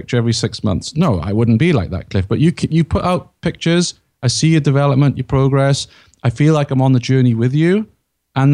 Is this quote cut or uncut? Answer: uncut